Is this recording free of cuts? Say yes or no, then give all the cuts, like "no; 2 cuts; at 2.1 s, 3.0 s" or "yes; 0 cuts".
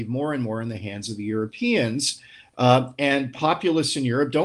yes; 0 cuts